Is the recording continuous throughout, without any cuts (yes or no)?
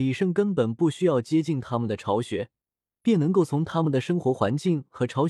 yes